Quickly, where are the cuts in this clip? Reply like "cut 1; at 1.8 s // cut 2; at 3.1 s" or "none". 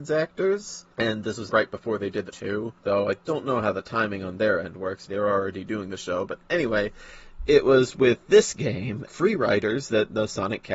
cut 1; at 0.9 s // cut 2; at 1.5 s // cut 3; at 2.3 s // cut 4; at 2.8 s // cut 5; at 3.2 s // cut 6; at 5.1 s // cut 7; at 9.1 s